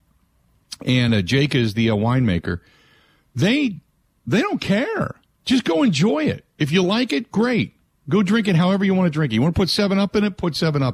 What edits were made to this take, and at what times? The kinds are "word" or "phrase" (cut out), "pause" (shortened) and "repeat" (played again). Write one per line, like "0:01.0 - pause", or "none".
none